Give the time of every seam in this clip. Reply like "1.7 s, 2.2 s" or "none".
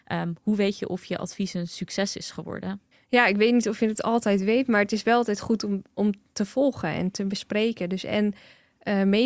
2.9 s